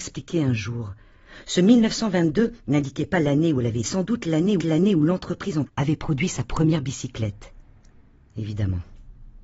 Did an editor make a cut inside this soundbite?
yes; 3 cuts; at 3.8 s, 4.6 s, 5.7 s

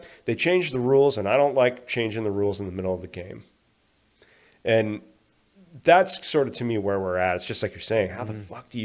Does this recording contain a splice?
no; 0 cuts

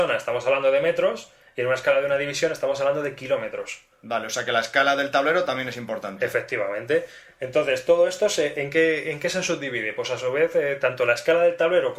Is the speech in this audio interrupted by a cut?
no; 0 cuts

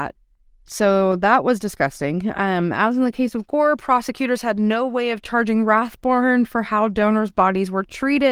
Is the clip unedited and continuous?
yes; 0 cuts

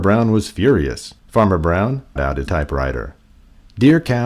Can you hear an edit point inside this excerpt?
yes; 3 cuts; at 1.2 s, 2.2 s, 2.5 s

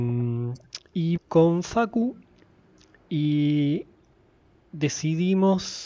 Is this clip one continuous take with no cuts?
no; 1 cut; at 1.2 s

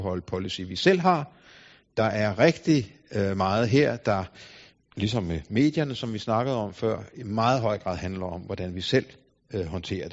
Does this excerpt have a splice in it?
no; 0 cuts

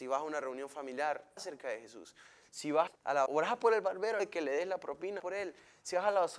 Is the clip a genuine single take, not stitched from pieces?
no; 5 cuts; at 1.4 s, 2.9 s, 3.3 s, 4.2 s, 5.2 s

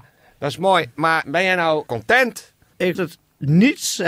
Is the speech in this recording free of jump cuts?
no; 3 cuts; at 1.2 s, 1.9 s, 2.9 s

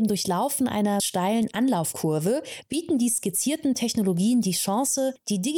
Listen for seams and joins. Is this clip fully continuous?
no; 1 cut; at 1.0 s

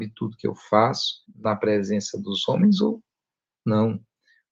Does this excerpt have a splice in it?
yes; 1 cut; at 1.3 s

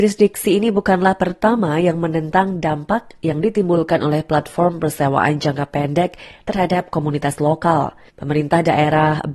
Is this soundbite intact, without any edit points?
no; 1 cut; at 8.1 s

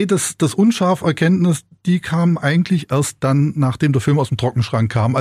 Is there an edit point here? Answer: no; 0 cuts

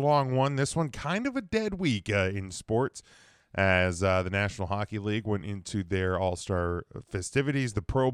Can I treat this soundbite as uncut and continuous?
yes; 0 cuts

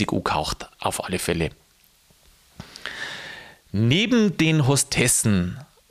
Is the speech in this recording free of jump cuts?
yes; 0 cuts

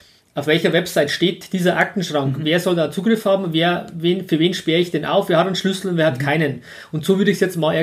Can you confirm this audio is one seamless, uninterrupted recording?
yes; 0 cuts

